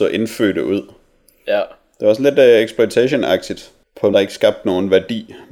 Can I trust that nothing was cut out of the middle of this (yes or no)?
no